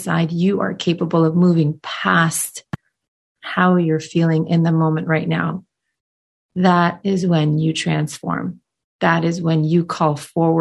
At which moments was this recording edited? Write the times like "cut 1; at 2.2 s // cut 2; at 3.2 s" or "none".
none